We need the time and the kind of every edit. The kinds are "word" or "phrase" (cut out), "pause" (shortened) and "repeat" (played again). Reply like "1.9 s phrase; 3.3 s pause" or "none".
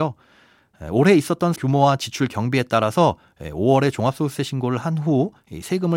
1.6 s word